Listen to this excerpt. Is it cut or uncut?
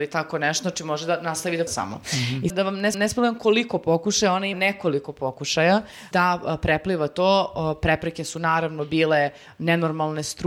cut